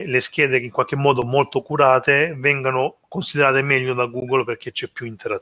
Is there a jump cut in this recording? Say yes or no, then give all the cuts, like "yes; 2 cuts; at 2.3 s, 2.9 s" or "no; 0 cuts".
no; 0 cuts